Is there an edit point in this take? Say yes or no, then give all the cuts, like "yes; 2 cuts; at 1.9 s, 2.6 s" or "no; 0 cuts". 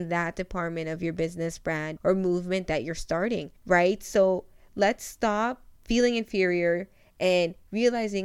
yes; 3 cuts; at 2.0 s, 3.6 s, 5.8 s